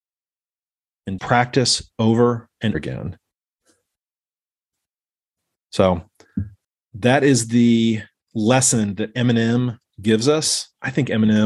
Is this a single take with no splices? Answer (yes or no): no